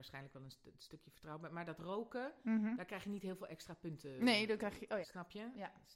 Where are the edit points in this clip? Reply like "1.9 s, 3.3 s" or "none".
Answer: 5.0 s

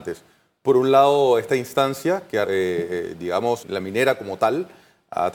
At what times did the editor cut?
2.4 s, 3.6 s

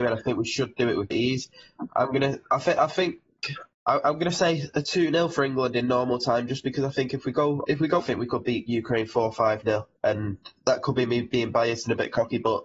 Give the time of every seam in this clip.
1.1 s, 3.7 s, 7.6 s, 8.0 s, 10.0 s

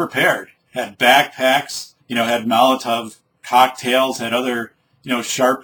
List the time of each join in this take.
2.0 s

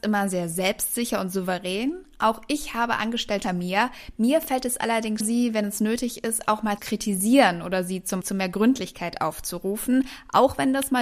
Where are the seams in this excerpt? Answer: 3.4 s, 5.2 s, 6.8 s, 8.2 s

